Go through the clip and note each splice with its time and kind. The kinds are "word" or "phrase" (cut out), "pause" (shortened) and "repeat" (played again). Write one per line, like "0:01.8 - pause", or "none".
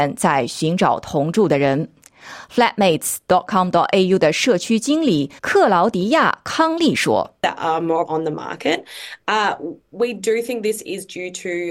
0:05.4 - pause
0:07.4 - pause
0:08.1 - word